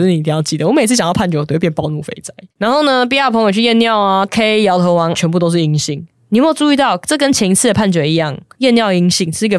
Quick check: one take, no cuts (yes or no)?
no